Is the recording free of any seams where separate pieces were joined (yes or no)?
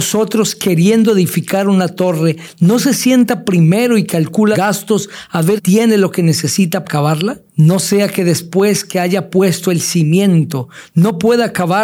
no